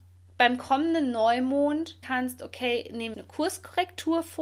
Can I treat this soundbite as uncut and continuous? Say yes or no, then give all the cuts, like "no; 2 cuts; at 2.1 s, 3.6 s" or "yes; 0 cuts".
no; 2 cuts; at 2.0 s, 3.1 s